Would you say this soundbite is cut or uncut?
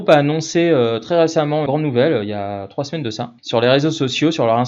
cut